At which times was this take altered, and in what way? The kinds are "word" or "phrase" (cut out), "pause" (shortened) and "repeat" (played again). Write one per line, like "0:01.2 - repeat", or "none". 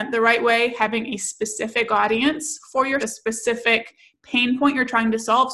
0:03.0 - phrase